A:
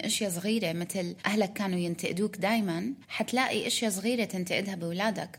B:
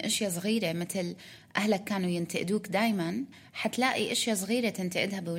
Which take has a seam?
A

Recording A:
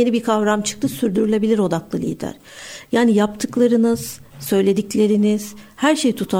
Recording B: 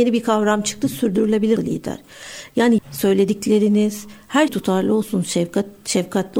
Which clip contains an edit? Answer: B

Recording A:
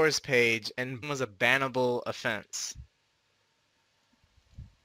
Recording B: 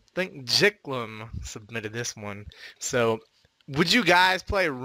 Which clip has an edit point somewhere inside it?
A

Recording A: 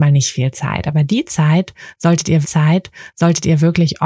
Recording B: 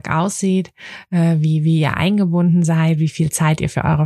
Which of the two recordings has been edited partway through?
A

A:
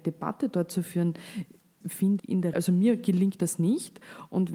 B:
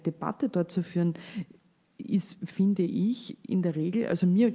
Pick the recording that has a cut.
A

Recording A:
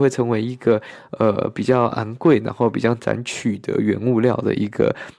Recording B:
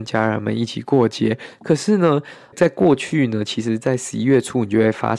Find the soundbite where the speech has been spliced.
B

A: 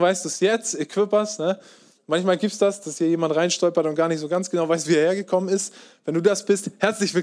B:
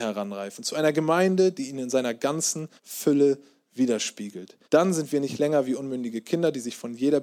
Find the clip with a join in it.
B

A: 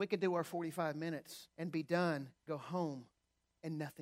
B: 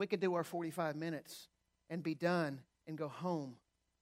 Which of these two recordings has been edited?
A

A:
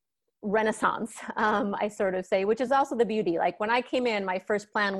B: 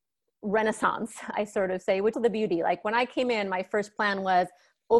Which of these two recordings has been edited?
B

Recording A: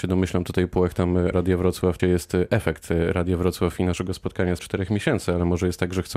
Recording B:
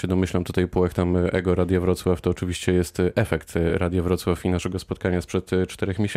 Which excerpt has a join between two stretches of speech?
A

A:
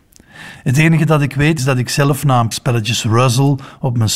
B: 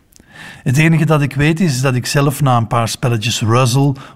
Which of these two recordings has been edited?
A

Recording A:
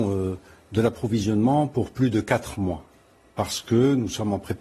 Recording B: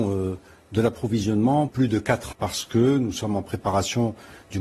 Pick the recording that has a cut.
B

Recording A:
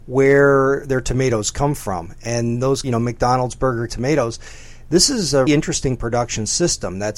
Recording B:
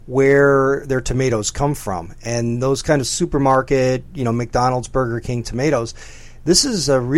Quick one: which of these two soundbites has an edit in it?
A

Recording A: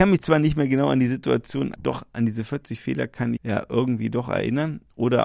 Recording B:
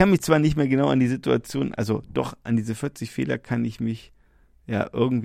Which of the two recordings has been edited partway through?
A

